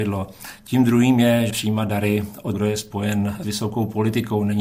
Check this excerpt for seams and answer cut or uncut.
cut